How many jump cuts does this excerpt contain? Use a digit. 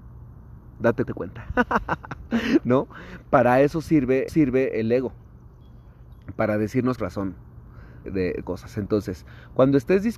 5